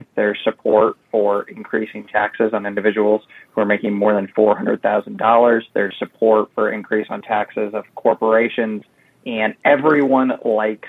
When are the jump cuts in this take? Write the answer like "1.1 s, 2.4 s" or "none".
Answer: 5.7 s